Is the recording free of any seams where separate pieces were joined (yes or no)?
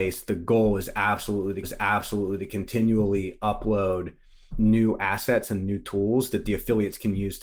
no